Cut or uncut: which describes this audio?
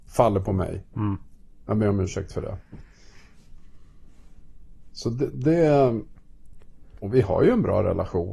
uncut